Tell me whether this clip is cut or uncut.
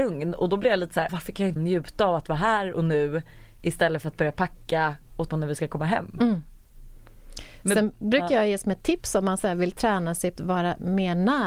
cut